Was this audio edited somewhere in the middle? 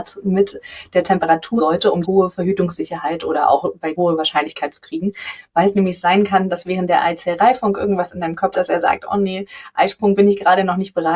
yes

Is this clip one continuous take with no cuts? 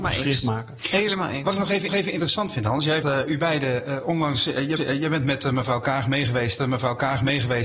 no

